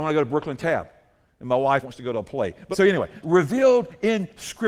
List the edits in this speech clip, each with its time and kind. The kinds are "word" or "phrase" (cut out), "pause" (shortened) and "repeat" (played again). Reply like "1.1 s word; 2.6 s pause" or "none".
1.8 s word; 2.7 s word; 3.2 s word